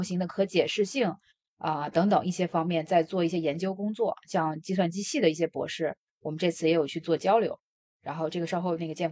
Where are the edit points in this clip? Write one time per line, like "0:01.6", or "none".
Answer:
none

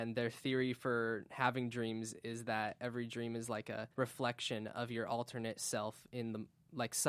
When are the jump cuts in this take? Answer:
0:03.9

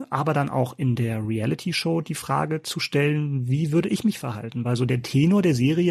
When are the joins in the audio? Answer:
none

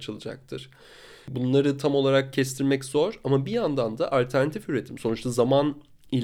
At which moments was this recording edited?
none

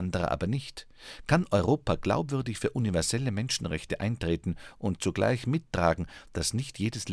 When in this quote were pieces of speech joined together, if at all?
none

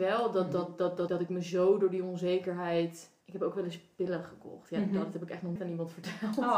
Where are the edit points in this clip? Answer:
0:01.1
0:03.2
0:05.6

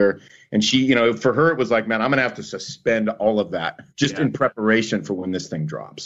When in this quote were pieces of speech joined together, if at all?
0:03.9

